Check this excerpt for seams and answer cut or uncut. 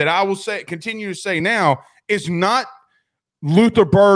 uncut